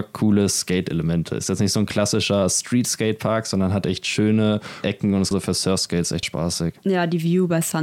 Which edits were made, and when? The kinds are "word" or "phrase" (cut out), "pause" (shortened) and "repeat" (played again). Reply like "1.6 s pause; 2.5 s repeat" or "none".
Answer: 4.8 s word; 5.3 s word; 6.2 s word